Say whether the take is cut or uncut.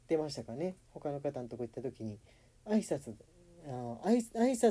uncut